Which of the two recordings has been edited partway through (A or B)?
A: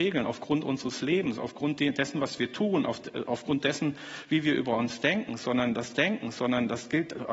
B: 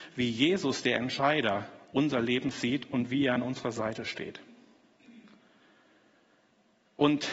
A